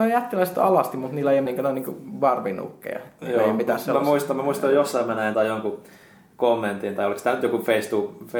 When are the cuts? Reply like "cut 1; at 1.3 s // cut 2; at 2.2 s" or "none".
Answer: cut 1; at 1.5 s // cut 2; at 5.3 s